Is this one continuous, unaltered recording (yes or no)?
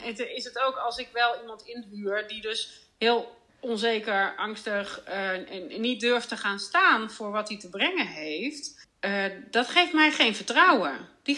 no